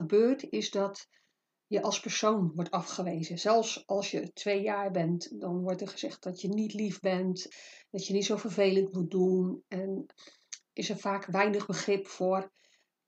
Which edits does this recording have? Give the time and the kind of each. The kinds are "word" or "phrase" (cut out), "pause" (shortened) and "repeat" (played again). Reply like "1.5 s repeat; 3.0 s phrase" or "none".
none